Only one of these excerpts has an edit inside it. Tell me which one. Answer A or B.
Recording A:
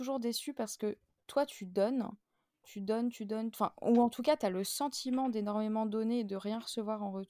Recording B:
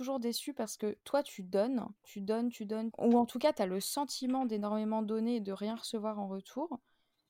B